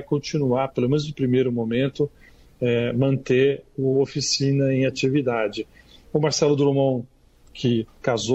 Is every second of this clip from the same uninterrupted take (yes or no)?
yes